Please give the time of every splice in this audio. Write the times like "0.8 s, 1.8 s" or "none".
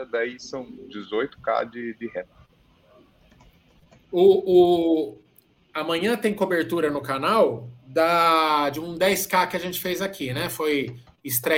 none